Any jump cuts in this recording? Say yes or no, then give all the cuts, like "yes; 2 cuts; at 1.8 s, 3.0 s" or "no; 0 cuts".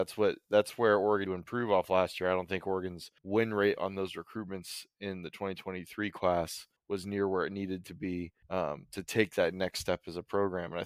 yes; 4 cuts; at 1.3 s, 3.2 s, 6.8 s, 8.4 s